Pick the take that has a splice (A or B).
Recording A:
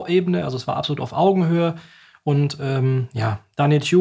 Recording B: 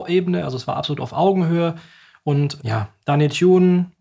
B